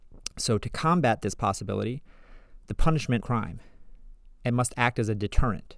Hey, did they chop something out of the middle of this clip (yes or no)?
yes